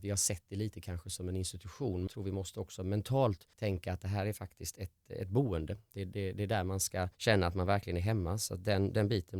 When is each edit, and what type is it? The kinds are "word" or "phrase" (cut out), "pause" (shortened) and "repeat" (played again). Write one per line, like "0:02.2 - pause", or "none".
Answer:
0:02.1 - word
0:03.5 - pause
0:07.1 - pause